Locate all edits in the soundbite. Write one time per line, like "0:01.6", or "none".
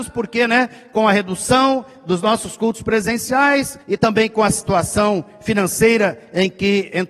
0:03.8